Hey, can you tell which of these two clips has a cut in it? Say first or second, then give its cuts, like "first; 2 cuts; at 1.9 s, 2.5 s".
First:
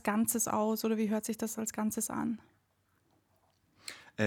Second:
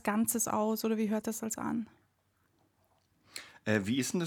second; 2 cuts; at 1.2 s, 1.6 s